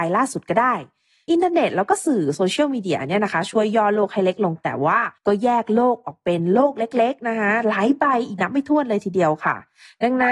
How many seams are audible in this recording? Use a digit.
1